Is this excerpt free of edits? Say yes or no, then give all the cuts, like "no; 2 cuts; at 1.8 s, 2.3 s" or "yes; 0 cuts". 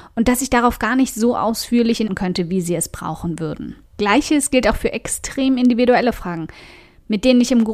no; 2 cuts; at 2.1 s, 3.9 s